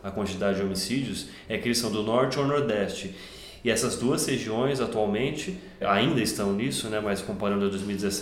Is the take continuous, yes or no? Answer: no